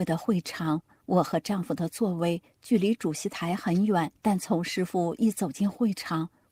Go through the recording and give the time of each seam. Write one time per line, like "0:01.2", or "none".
0:04.2